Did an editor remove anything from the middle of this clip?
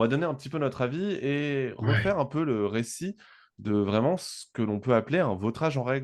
no; 0 cuts

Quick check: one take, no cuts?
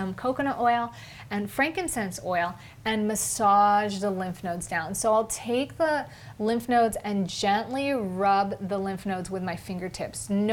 yes; 0 cuts

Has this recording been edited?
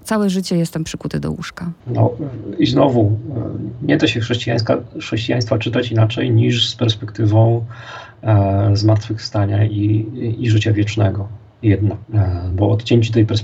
no; 0 cuts

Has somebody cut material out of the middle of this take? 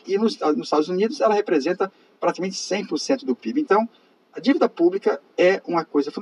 no; 0 cuts

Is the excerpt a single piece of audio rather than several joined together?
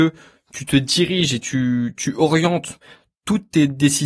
yes; 0 cuts

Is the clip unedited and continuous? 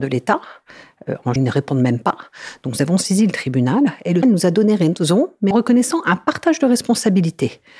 no; 3 cuts; at 1.4 s, 4.2 s, 5.5 s

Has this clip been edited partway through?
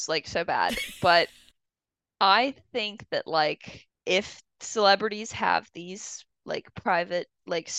no; 0 cuts

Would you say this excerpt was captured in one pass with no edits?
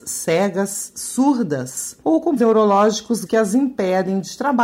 no; 3 cuts; at 2.0 s, 2.4 s, 3.3 s

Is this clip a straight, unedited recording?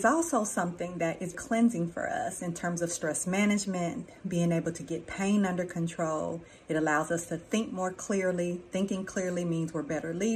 no; 1 cut; at 1.3 s

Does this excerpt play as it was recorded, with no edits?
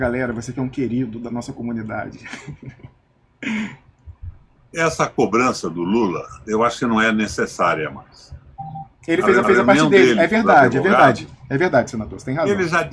no; 1 cut; at 9.4 s

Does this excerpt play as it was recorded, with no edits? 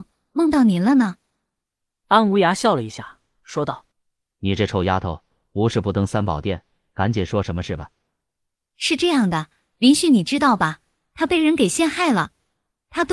no; 1 cut; at 3.9 s

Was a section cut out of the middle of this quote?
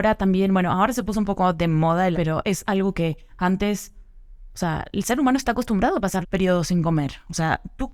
yes; 3 cuts; at 2.1 s, 3.3 s, 6.2 s

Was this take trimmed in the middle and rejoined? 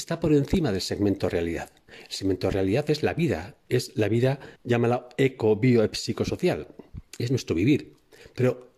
yes; 2 cuts; at 4.6 s, 7.1 s

